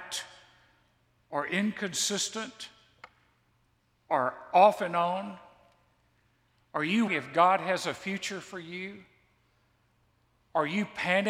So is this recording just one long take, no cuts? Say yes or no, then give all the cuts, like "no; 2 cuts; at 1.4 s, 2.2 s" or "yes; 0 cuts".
no; 1 cut; at 7.1 s